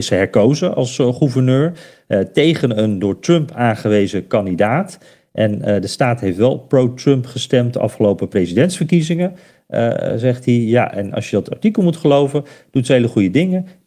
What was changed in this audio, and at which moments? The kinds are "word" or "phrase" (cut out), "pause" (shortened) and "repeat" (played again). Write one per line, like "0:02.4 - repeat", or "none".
none

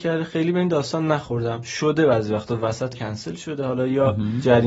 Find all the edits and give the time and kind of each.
0:02.9 - word

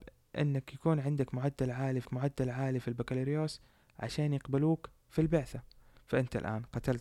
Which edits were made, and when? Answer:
0:02.1 - repeat

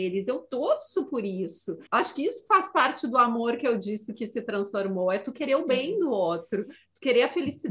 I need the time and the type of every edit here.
0:01.9 - pause

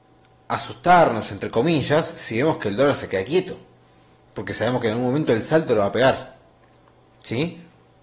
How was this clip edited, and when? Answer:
none

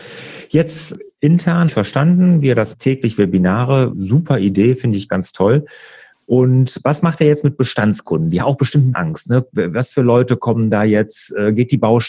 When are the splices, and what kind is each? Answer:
0:01.7 - word
0:02.7 - word
0:03.9 - word
0:05.1 - word
0:08.4 - word
0:08.9 - word

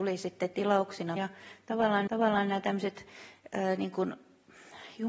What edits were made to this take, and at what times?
0:01.2 - word
0:02.1 - repeat

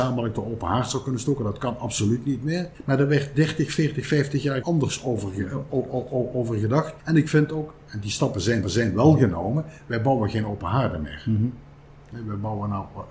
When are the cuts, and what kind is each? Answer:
0:02.7 - pause
0:04.6 - word
0:07.0 - pause
0:08.6 - repeat

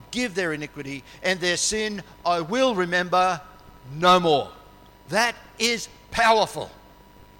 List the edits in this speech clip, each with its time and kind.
0:04.9 - pause

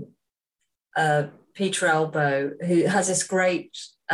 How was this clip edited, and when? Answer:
none

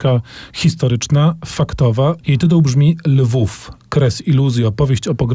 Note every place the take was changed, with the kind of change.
none

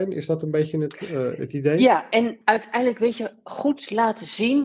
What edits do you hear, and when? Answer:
none

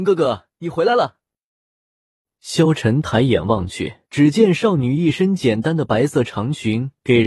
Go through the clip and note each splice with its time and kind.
0:04.1 - pause

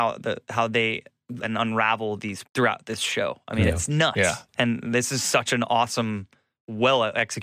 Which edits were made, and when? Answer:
0:01.4 - word
0:02.4 - word
0:04.5 - pause

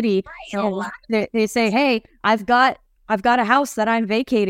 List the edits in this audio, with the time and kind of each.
none

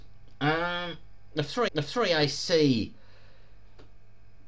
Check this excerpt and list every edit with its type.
0:01.7 - repeat

